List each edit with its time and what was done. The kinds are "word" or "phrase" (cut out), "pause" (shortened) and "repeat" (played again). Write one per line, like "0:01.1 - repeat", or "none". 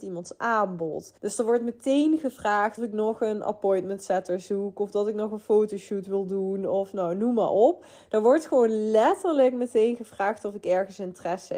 0:01.2 - pause
0:02.8 - word